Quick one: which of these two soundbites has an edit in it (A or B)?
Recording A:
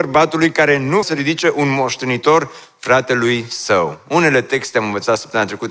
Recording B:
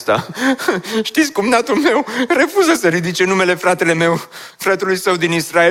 A